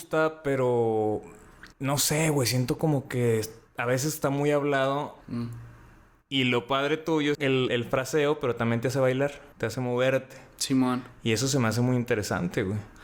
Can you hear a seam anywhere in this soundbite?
yes; 5 cuts; at 1.7 s, 5.2 s, 7.3 s, 7.7 s, 9.5 s

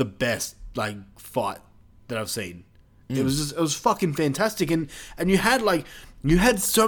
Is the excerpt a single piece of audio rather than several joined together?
yes; 0 cuts

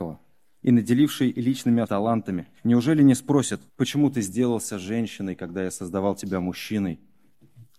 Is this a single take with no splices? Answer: no; 3 cuts; at 1.8 s, 2.6 s, 3.7 s

